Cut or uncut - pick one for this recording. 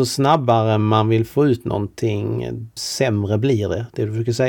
cut